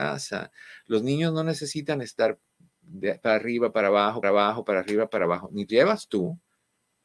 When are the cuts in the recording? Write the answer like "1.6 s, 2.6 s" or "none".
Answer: 4.2 s, 5.7 s